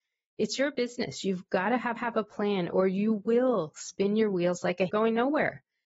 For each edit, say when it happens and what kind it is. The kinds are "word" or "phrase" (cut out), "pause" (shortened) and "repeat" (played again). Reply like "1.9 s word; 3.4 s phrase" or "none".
2.0 s repeat; 4.9 s word